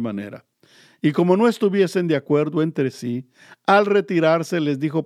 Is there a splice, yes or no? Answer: no